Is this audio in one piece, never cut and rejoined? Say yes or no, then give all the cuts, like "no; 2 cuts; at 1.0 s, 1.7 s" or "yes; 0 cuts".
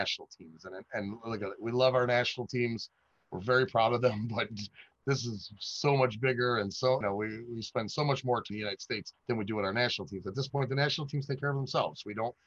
no; 3 cuts; at 7.0 s, 8.5 s, 9.2 s